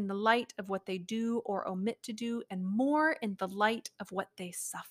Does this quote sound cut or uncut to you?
uncut